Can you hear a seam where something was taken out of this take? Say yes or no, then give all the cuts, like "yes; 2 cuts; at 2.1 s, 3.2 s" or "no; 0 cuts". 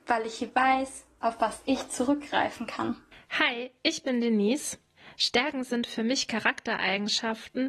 no; 0 cuts